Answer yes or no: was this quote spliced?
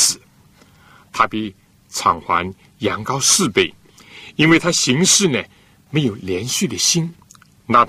no